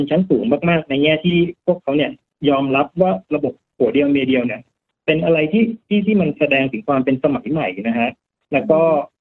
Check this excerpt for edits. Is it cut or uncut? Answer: uncut